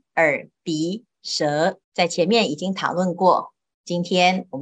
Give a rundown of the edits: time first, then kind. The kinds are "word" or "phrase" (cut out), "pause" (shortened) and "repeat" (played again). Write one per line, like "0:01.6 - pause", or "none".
0:01.8 - pause